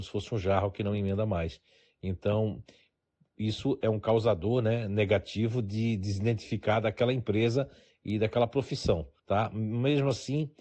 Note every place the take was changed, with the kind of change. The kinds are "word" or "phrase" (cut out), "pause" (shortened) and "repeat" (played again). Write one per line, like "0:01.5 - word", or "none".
0:09.2 - pause